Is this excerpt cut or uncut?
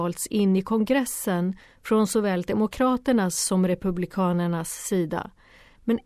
uncut